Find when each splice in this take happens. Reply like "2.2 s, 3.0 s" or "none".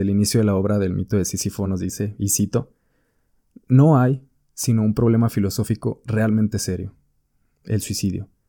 none

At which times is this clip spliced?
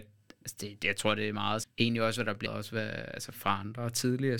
1.6 s, 2.5 s

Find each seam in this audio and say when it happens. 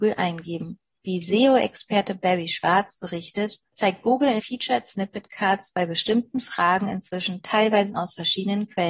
4.4 s, 7.9 s

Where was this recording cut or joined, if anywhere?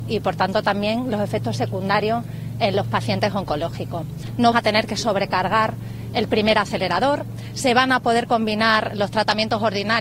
4.5 s

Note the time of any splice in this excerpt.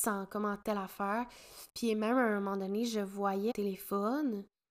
1.7 s, 3.5 s

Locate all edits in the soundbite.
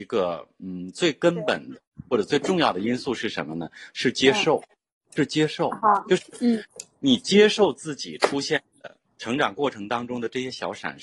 none

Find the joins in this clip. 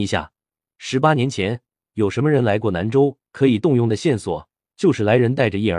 3.3 s

